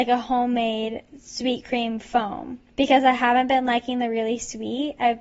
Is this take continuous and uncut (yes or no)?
no